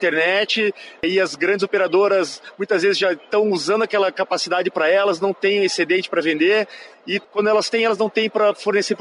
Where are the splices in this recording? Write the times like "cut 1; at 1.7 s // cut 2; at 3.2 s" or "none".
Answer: none